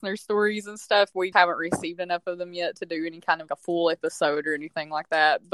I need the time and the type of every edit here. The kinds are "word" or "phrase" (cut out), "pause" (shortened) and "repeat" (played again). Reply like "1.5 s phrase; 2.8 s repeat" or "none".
1.3 s word; 3.5 s word